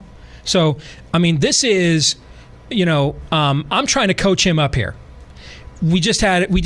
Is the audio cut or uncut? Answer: uncut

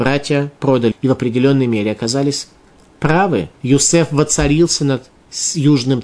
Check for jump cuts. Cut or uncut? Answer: cut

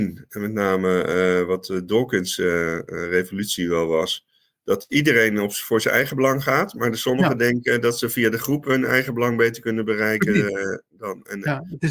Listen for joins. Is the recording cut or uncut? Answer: uncut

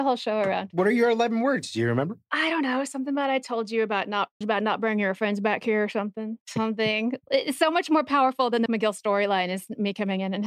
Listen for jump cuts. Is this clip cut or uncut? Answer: cut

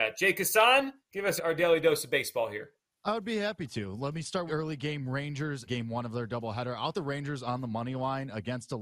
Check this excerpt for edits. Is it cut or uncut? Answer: cut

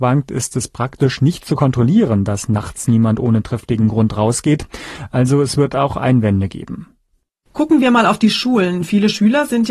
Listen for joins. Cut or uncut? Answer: uncut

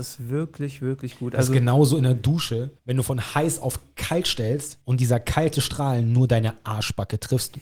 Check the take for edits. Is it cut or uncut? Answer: cut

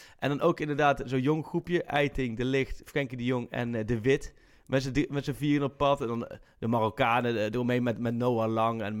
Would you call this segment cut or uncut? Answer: uncut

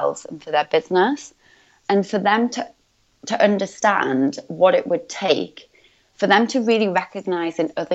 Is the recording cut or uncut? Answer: uncut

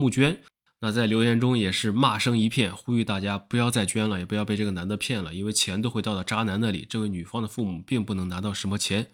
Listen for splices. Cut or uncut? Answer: uncut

